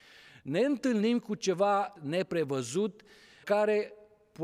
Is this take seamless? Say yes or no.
no